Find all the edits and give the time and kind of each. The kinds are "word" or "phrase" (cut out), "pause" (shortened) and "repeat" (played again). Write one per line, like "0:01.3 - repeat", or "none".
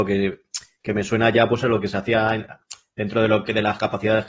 none

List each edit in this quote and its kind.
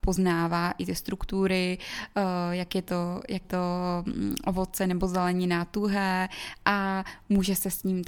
0:03.4 - word

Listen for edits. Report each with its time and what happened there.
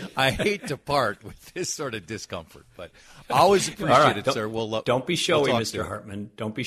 none

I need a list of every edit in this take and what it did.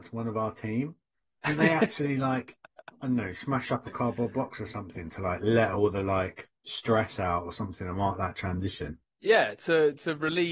0:06.6 - pause

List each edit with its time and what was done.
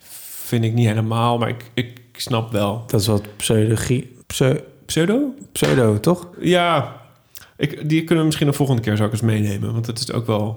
0:04.2 - pause
0:06.3 - pause

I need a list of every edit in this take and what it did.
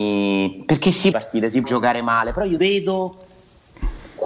0:01.1 - phrase
0:01.6 - word
0:02.6 - word

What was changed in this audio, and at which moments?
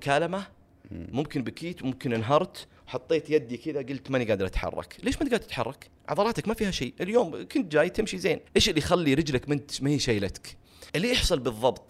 0:02.8 - pause
0:06.0 - pause
0:08.5 - pause
0:10.9 - pause

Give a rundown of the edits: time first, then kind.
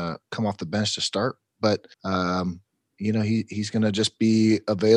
0:01.9 - pause

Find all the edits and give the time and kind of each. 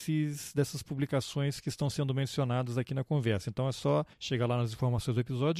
0:04.1 - pause

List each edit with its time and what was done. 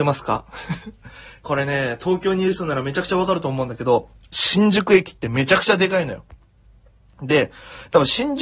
none

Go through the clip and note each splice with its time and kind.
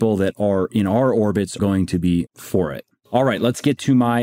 0:01.6 - word
0:02.3 - word

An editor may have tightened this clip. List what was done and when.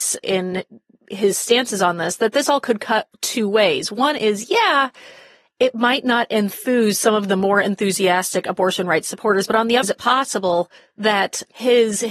0:09.8 - word
0:10.8 - pause

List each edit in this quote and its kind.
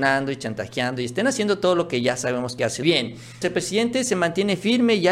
0:02.8 - word
0:03.4 - word

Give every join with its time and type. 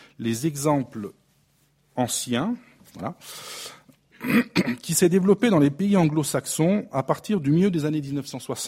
none

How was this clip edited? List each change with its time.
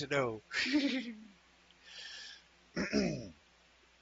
none

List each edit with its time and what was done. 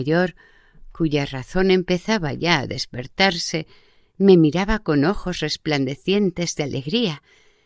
none

